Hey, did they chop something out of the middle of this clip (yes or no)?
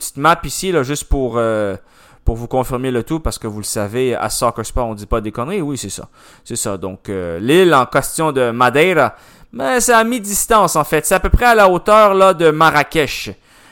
no